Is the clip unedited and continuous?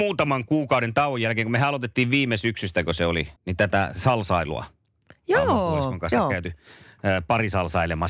no; 1 cut; at 3.4 s

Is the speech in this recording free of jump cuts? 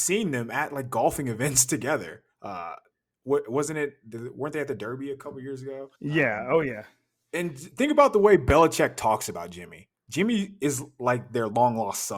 no; 1 cut; at 6.0 s

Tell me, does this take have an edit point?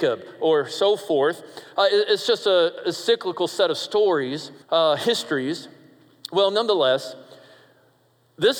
yes; 1 cut; at 4.6 s

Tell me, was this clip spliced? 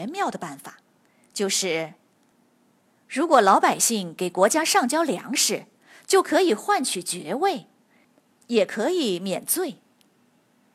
no; 0 cuts

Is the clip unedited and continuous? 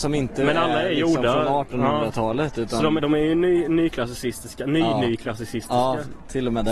no; 1 cut; at 3.0 s

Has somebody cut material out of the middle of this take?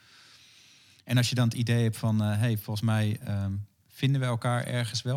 no; 0 cuts

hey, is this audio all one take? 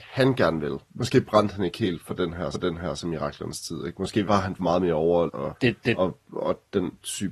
no; 4 cuts; at 2.5 s, 4.3 s, 4.6 s, 5.3 s

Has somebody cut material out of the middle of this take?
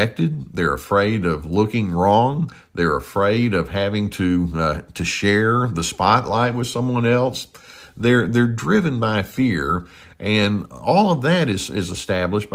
no; 0 cuts

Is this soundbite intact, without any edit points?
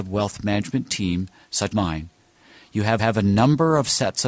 no; 2 cuts; at 1.7 s, 3.0 s

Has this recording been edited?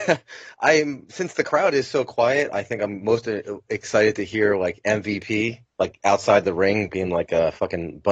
no; 0 cuts

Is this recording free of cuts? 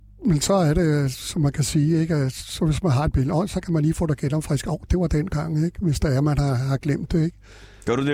yes; 0 cuts

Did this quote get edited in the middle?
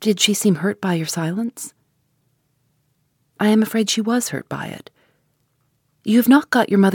no; 0 cuts

